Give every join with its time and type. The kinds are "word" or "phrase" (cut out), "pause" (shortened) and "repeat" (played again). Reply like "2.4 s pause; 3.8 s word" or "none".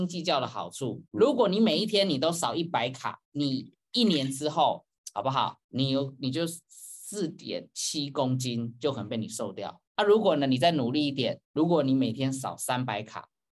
1.1 s pause; 3.2 s pause; 5.6 s pause; 9.9 s pause; 11.4 s pause